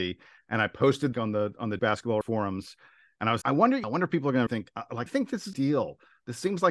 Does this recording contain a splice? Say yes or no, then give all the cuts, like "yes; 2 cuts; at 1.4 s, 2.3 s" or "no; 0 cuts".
yes; 8 cuts; at 1.1 s, 1.8 s, 2.2 s, 3.4 s, 3.8 s, 4.5 s, 5.1 s, 5.5 s